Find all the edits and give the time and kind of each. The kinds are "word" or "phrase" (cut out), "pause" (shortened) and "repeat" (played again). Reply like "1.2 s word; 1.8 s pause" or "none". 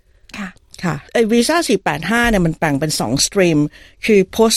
1.1 s pause